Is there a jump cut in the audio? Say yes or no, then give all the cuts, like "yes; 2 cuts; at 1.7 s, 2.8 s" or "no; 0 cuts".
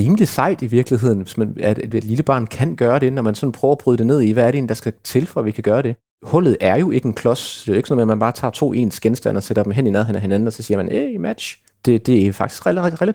no; 0 cuts